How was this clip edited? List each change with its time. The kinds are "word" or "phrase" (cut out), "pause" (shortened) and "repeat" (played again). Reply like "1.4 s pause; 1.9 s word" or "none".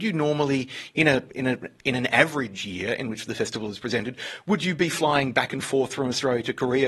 none